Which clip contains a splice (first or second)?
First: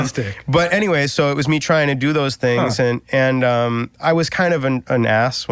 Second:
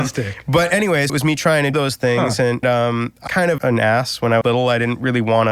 second